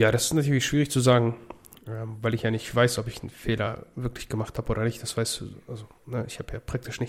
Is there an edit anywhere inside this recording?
no; 0 cuts

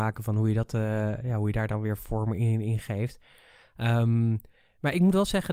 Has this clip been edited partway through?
no; 0 cuts

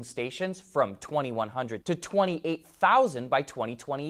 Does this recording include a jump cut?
yes; 1 cut; at 1.8 s

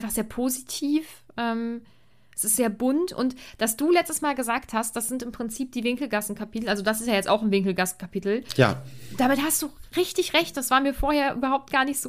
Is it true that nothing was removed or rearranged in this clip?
yes; 0 cuts

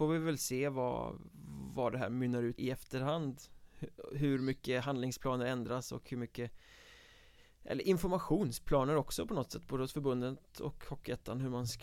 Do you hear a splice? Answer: yes; 1 cut; at 2.6 s

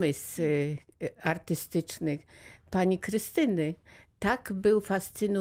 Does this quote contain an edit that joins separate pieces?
no; 0 cuts

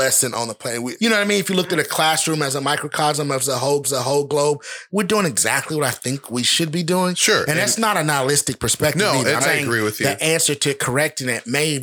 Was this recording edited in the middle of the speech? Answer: yes; 3 cuts; at 1.0 s, 3.8 s, 9.4 s

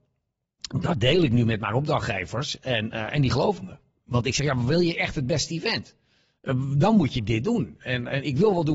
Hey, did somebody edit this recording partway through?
no; 0 cuts

